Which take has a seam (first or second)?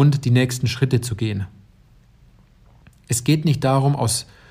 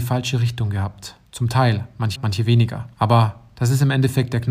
second